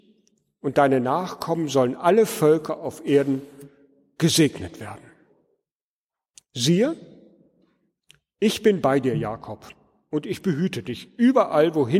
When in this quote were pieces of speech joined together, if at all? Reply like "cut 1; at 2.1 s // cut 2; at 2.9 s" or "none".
none